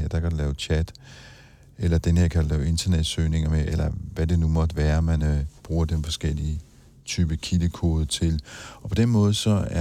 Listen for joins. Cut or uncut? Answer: uncut